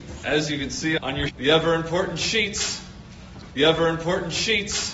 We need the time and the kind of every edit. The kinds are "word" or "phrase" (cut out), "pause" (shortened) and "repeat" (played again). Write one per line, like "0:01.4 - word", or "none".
0:01.0 - phrase
0:01.3 - word
0:03.6 - repeat